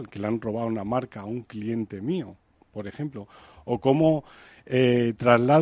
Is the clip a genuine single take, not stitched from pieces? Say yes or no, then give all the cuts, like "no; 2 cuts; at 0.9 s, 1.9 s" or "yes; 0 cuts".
yes; 0 cuts